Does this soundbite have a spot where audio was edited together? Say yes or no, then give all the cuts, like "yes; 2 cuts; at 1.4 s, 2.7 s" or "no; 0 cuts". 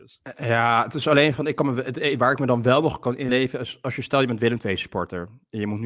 no; 0 cuts